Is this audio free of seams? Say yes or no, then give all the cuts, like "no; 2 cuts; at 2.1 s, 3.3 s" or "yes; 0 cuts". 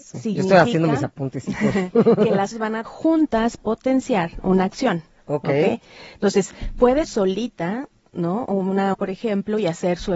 no; 5 cuts; at 2.5 s, 2.8 s, 3.6 s, 7.0 s, 8.9 s